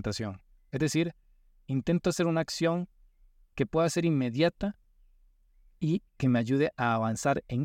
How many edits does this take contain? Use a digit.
0